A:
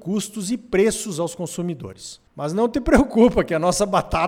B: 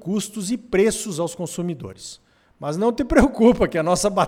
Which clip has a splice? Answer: A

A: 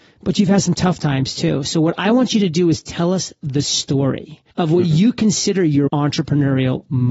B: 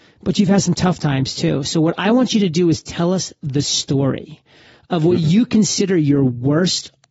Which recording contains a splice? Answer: A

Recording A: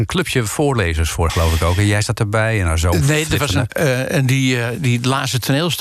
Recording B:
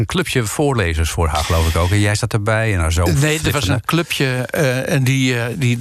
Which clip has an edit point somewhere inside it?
A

